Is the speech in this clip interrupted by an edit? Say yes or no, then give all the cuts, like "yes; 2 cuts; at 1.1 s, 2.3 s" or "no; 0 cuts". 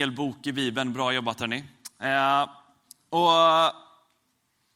no; 0 cuts